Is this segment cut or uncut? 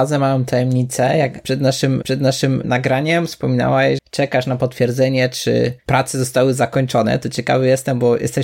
cut